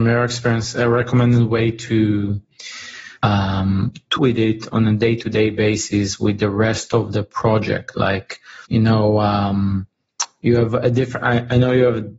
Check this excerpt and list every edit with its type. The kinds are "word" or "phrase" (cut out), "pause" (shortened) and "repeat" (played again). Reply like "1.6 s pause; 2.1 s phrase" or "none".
3.2 s pause; 4.2 s word; 8.6 s pause